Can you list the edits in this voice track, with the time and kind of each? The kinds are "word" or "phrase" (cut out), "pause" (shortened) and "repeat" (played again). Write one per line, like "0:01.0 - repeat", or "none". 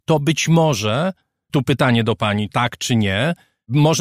0:01.5 - word
0:02.5 - word

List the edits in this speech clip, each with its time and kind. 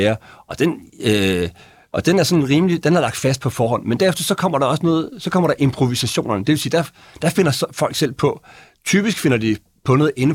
none

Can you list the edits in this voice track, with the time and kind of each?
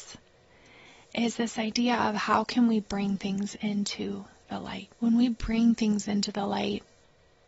0:04.9 - pause

